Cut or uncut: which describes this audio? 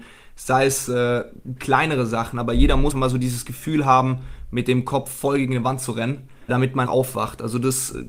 cut